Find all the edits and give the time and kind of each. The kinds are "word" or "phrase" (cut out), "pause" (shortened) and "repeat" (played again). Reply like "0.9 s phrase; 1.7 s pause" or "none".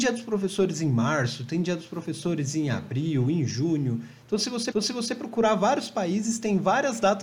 4.7 s repeat